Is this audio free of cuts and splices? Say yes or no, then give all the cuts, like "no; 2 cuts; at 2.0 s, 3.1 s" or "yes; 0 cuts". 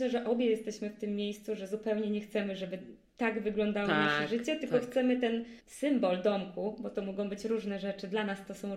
no; 1 cut; at 5.6 s